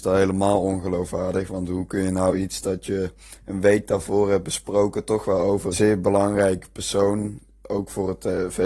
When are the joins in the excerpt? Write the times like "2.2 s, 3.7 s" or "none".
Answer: 5.7 s